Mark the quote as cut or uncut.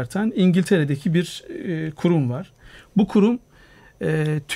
uncut